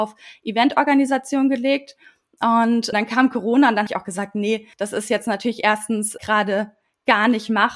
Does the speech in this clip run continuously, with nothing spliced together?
no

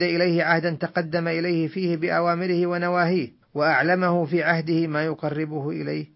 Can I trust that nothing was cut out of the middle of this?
no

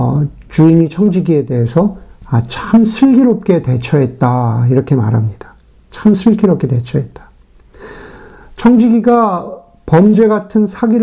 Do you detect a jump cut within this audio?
no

